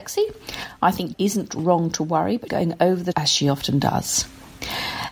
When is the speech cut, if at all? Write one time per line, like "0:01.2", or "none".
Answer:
0:01.1
0:02.5
0:03.1